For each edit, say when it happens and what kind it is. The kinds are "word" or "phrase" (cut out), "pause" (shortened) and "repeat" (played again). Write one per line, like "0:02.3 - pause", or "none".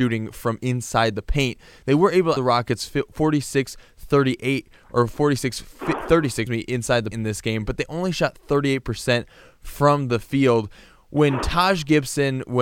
0:02.4 - word
0:06.5 - word
0:07.1 - word